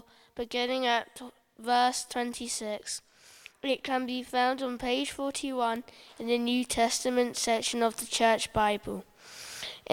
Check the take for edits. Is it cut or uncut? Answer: uncut